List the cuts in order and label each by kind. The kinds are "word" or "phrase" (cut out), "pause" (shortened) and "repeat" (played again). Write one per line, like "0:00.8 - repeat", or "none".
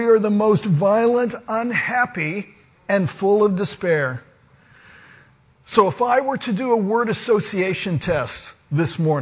none